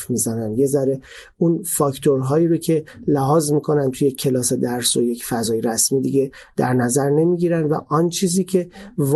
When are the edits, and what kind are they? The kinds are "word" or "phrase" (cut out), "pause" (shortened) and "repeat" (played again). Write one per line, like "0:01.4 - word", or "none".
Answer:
none